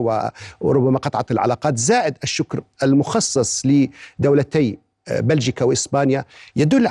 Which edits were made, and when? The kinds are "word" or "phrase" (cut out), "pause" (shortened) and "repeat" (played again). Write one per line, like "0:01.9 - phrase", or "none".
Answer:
none